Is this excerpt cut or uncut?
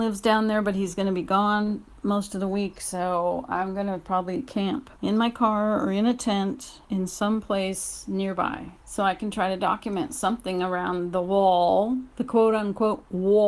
cut